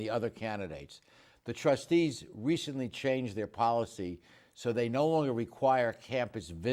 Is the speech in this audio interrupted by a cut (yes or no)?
no